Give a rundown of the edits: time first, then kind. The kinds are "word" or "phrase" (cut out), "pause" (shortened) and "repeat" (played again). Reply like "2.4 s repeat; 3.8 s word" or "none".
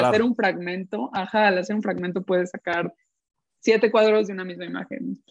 none